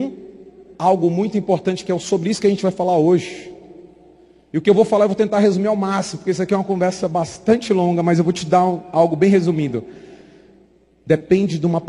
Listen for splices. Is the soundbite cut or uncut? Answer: uncut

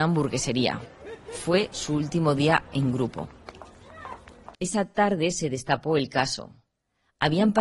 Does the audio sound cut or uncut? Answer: cut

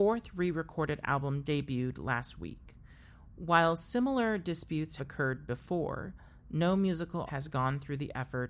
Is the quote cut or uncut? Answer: cut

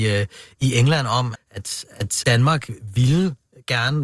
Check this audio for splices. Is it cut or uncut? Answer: cut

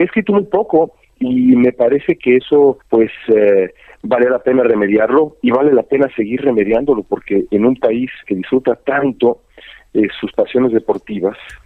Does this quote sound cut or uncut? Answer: cut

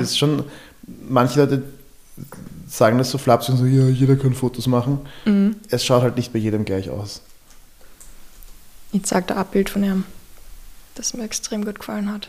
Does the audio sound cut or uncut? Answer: uncut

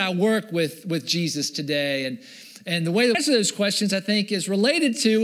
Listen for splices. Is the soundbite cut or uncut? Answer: cut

